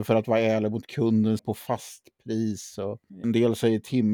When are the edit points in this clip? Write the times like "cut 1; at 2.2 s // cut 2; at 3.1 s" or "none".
cut 1; at 1.4 s // cut 2; at 3.2 s

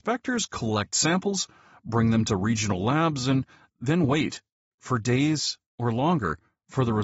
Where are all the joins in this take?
none

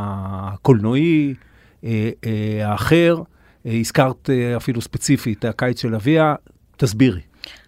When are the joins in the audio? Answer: cut 1; at 5.4 s

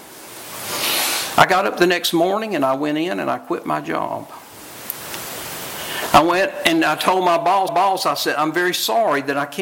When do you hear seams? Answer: cut 1; at 7.7 s

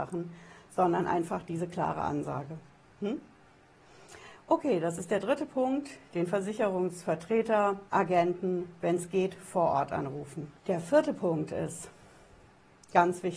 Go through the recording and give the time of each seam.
cut 1; at 7.9 s // cut 2; at 10.6 s

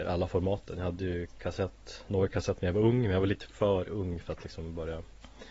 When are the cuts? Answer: none

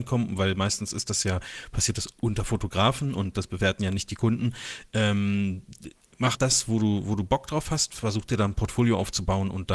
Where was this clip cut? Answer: cut 1; at 6.3 s

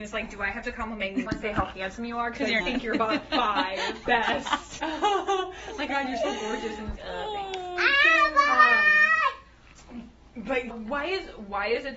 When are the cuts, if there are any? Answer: cut 1; at 1.3 s // cut 2; at 2.6 s // cut 3; at 4.1 s // cut 4; at 4.8 s // cut 5; at 5.9 s // cut 6; at 7.0 s // cut 7; at 10.7 s

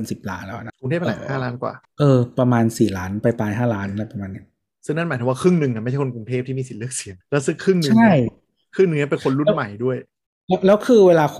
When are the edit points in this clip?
cut 1; at 7.2 s

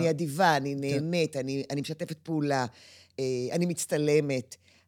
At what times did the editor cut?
none

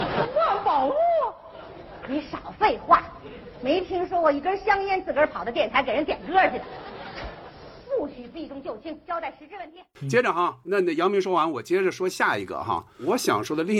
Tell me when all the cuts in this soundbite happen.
cut 1; at 10.6 s

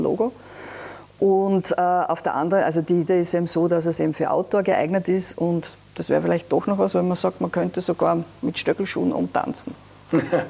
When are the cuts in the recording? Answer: cut 1; at 3.1 s

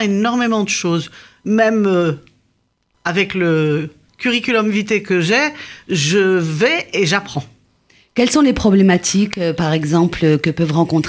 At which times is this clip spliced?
none

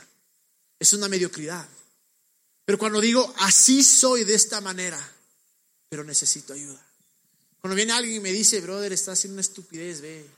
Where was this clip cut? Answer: none

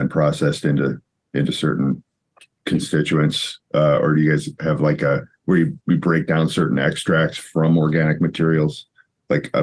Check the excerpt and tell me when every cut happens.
none

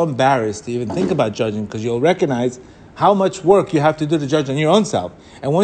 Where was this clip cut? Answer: none

